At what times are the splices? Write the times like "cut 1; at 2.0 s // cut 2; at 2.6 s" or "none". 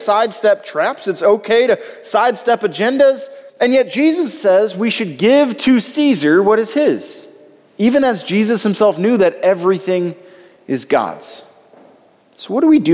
cut 1; at 3.5 s